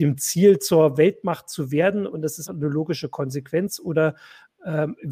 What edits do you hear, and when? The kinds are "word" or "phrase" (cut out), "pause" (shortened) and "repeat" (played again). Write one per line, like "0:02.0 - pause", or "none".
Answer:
0:02.5 - word

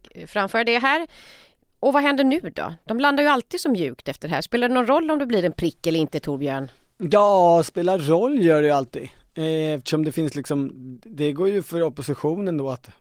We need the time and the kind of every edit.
none

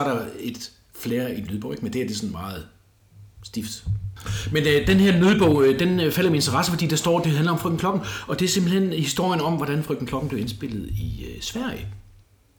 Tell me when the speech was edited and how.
none

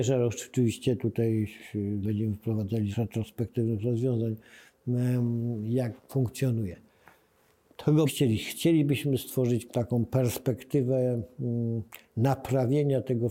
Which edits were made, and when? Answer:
0:02.0 - word
0:02.9 - word
0:06.0 - word
0:08.1 - word
0:09.7 - word

